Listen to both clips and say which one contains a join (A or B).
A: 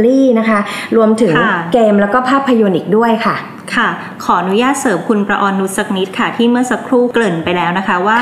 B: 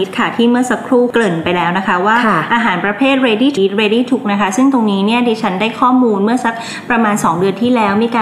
B